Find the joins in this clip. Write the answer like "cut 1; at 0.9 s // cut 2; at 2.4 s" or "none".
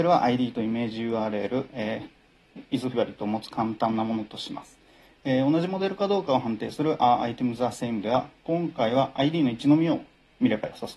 cut 1; at 2.9 s